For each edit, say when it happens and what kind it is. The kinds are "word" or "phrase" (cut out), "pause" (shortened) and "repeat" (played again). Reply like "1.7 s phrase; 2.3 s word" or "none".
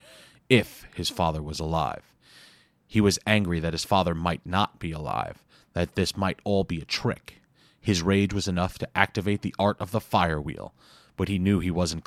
none

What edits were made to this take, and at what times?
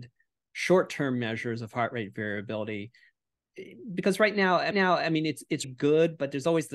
4.7 s repeat; 5.6 s word

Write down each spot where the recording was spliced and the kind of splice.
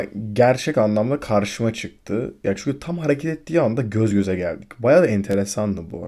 none

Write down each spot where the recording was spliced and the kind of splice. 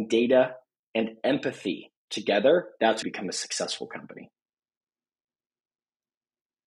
2.0 s pause; 3.0 s phrase

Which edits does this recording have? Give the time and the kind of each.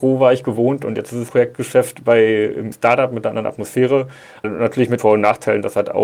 1.3 s word; 2.7 s word; 4.4 s word; 5.0 s word

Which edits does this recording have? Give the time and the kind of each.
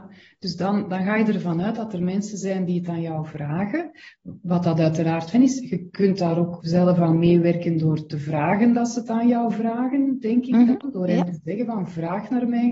5.3 s word; 6.6 s word

